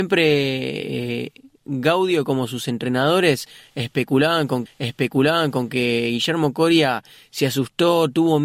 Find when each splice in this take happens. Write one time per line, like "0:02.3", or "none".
0:04.7